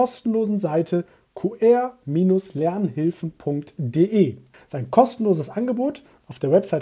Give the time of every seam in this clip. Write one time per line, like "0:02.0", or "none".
0:04.5